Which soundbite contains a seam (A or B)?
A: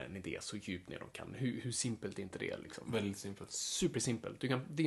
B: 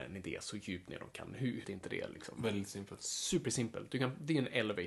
B